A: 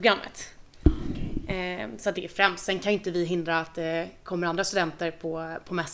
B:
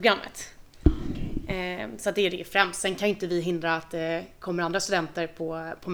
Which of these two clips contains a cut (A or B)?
A